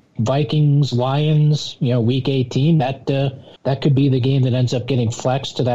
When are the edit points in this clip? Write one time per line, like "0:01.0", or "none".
0:03.6